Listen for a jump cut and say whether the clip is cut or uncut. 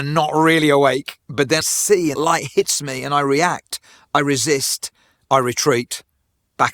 cut